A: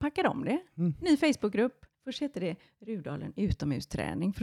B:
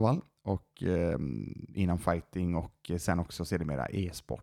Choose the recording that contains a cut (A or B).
A